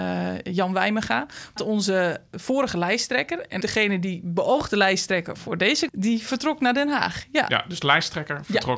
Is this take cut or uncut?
cut